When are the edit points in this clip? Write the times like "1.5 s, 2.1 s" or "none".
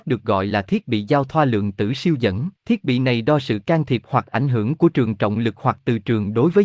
2.6 s